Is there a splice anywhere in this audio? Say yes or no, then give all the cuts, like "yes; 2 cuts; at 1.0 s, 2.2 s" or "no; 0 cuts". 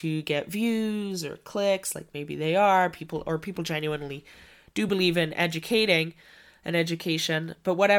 no; 0 cuts